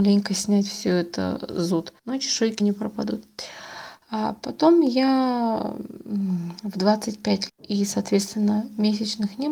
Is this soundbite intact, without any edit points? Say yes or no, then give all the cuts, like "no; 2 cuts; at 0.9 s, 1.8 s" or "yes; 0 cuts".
no; 3 cuts; at 2.0 s, 2.6 s, 7.5 s